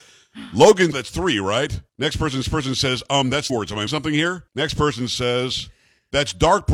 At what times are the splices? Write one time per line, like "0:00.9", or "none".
0:00.9
0:01.9
0:02.4
0:03.5
0:03.9
0:04.5